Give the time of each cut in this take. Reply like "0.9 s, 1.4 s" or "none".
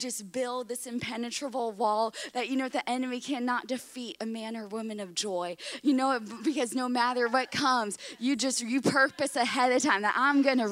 none